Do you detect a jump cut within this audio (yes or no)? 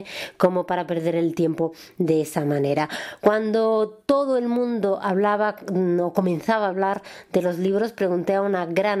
no